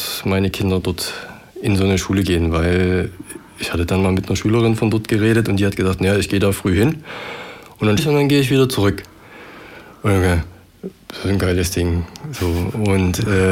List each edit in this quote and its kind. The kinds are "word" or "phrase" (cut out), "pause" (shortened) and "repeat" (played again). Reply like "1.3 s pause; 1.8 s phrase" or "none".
8.0 s word